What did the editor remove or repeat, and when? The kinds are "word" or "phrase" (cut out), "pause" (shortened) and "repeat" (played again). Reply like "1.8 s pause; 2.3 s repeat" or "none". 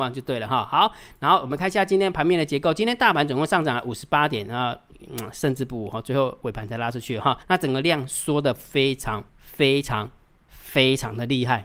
7.4 s pause; 9.3 s pause